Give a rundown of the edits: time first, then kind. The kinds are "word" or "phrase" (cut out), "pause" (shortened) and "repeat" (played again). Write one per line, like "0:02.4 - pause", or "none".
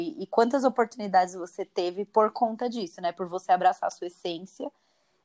none